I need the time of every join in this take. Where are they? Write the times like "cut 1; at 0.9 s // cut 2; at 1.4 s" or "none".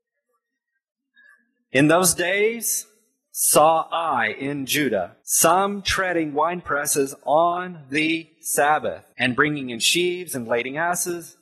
cut 1; at 5.2 s // cut 2; at 9.1 s